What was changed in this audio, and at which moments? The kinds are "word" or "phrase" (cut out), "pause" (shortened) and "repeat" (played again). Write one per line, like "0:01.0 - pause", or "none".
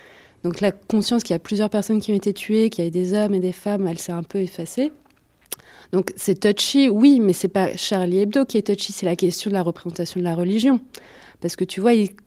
none